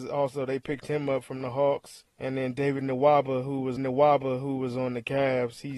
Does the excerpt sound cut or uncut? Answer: cut